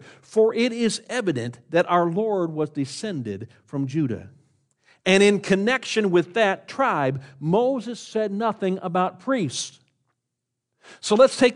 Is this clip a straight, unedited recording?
yes; 0 cuts

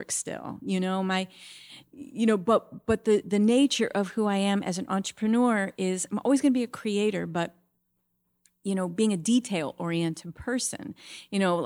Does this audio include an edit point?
no; 0 cuts

